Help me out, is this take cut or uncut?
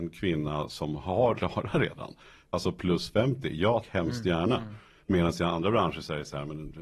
cut